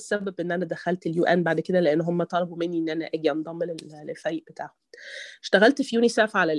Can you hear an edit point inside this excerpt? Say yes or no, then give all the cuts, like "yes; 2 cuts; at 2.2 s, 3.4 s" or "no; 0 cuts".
no; 0 cuts